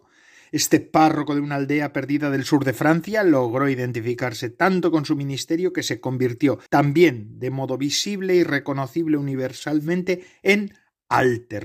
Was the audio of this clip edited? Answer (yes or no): yes